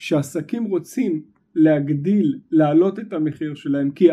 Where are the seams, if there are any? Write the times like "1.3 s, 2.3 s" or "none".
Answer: none